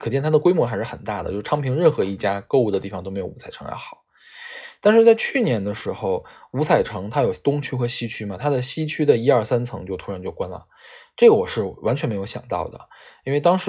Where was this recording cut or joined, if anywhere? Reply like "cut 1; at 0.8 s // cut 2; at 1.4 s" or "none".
none